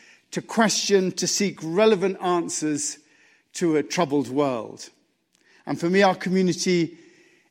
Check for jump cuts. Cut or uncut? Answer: uncut